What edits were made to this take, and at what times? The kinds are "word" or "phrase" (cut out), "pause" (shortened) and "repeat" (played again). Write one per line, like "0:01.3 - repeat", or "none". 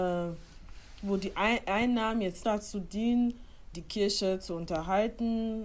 0:02.4 - word
0:03.7 - word